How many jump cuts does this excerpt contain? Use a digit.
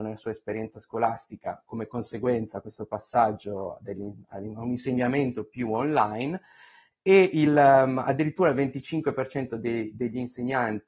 0